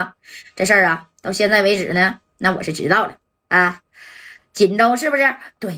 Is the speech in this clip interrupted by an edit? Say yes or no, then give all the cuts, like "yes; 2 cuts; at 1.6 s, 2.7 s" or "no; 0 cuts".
no; 0 cuts